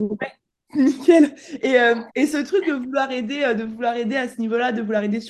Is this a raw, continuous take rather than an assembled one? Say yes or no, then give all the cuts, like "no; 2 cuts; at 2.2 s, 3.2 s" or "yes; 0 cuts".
no; 1 cut; at 2.1 s